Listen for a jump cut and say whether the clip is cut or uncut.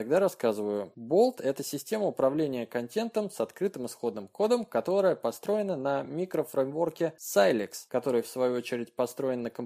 uncut